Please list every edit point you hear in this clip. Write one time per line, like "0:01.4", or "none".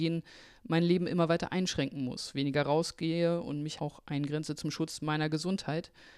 0:03.8